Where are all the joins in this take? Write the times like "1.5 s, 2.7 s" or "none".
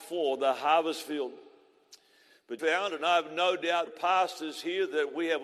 2.6 s, 3.9 s